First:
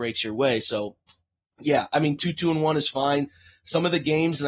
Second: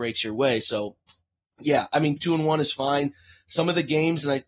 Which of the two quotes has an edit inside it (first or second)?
second